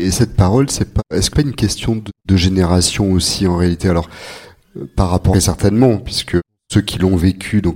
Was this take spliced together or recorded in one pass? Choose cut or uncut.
cut